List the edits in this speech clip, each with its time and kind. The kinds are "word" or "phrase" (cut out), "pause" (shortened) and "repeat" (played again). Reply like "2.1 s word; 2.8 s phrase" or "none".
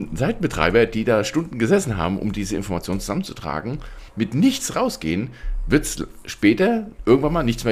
4.1 s pause